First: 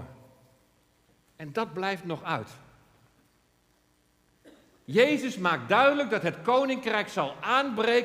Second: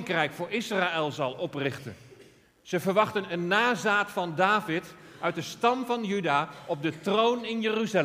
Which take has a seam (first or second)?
second